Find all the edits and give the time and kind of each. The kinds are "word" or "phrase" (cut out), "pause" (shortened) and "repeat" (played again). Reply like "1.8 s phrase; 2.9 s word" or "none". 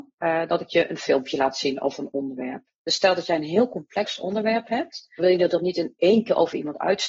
5.2 s phrase

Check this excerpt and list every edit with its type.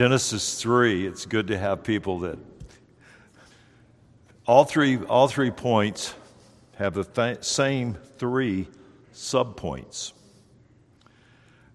none

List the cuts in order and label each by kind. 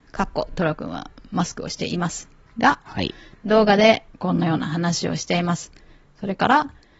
none

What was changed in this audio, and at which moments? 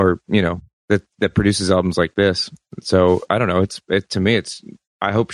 none

